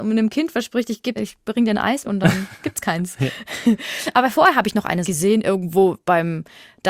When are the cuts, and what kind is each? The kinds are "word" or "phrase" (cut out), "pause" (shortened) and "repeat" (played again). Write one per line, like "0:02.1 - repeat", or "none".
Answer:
0:01.2 - word
0:02.0 - word
0:05.0 - phrase